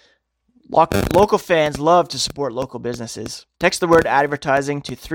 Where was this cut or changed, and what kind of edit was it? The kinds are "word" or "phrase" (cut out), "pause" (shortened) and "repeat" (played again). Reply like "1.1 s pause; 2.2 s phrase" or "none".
3.5 s pause